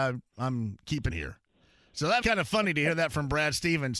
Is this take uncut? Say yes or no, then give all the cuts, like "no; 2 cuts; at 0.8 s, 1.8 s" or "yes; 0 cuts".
no; 2 cuts; at 1.1 s, 2.2 s